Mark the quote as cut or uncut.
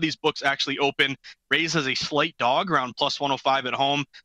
uncut